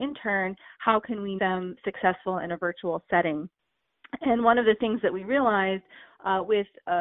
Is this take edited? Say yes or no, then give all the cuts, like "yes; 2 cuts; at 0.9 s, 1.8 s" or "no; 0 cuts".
yes; 1 cut; at 1.4 s